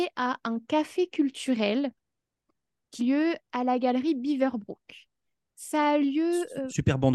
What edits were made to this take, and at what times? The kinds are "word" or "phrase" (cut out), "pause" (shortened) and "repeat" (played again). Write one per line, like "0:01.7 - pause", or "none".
0:03.0 - word